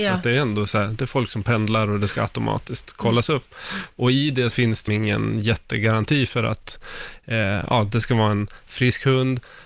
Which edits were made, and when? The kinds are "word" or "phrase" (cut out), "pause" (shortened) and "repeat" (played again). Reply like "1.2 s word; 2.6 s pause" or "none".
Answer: 4.5 s word; 4.9 s word